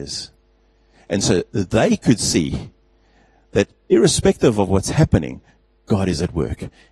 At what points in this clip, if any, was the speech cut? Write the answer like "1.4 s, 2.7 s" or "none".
none